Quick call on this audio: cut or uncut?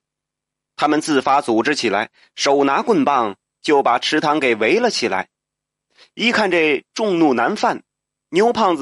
uncut